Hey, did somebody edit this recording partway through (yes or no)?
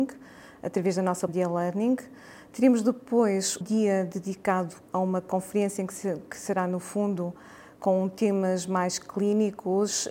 yes